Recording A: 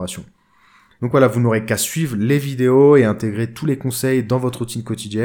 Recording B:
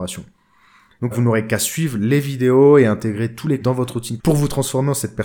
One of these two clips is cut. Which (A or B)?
B